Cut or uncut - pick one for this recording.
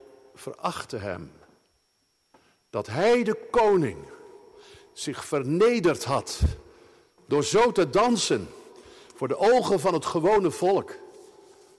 uncut